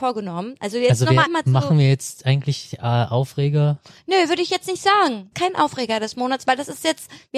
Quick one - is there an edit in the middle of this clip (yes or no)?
yes